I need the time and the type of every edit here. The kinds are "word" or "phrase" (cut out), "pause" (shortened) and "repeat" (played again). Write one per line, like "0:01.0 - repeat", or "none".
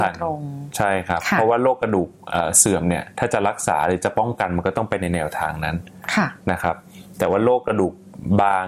0:03.1 - pause